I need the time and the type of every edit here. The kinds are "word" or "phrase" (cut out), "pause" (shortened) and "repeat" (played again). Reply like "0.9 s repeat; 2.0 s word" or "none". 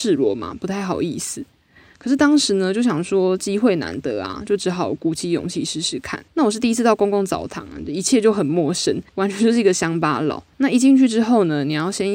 6.3 s pause; 9.1 s pause; 10.5 s pause